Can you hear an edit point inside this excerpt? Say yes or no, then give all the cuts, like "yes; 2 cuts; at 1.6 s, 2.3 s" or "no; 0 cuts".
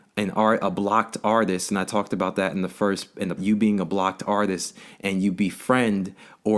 yes; 1 cut; at 3.4 s